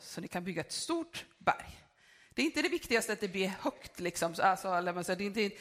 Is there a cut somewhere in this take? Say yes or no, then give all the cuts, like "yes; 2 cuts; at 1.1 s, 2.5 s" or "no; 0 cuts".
no; 0 cuts